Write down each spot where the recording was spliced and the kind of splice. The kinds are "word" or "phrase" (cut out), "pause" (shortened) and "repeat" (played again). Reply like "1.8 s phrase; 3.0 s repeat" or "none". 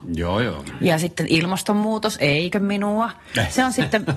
2.5 s word